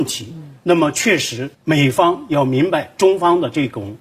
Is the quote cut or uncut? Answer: cut